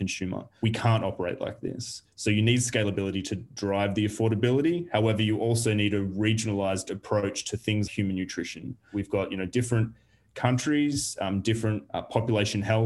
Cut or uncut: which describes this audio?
cut